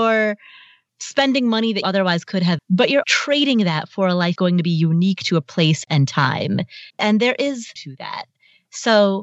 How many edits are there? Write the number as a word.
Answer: seven